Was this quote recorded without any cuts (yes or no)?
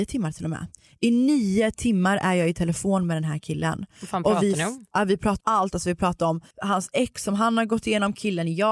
no